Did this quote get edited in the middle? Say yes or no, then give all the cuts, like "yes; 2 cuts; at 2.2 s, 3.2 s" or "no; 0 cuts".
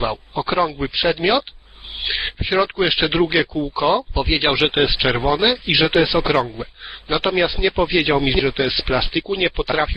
no; 0 cuts